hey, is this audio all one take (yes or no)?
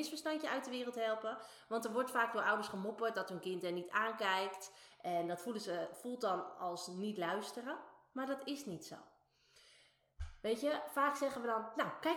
yes